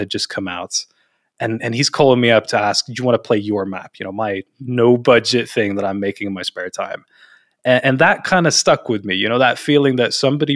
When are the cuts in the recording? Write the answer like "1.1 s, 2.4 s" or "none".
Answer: none